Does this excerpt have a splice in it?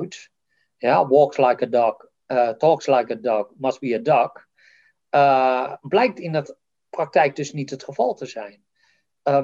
no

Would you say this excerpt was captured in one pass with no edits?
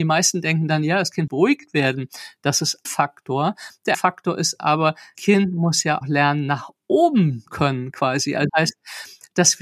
no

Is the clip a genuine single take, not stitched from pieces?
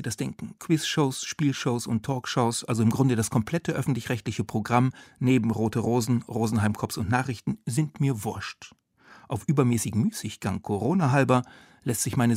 yes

